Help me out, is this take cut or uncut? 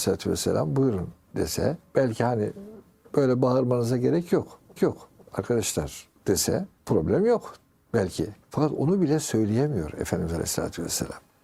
cut